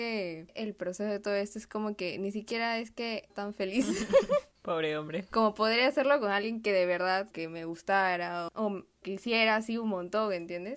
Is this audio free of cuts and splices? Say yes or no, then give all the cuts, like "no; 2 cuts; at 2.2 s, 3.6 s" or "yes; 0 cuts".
no; 3 cuts; at 3.3 s, 7.3 s, 9.0 s